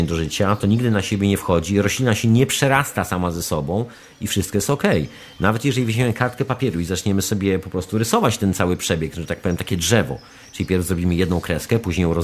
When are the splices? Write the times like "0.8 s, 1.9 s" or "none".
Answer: none